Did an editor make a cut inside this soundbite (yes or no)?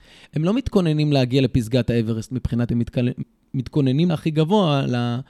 yes